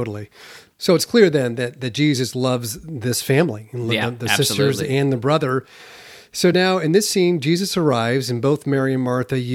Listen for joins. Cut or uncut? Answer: uncut